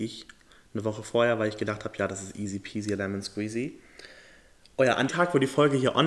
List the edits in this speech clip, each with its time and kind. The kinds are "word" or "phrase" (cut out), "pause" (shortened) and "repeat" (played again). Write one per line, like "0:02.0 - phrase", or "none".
0:05.1 - word